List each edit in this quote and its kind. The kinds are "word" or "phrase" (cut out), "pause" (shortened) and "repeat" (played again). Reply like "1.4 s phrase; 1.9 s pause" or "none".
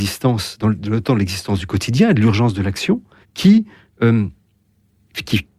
3.2 s pause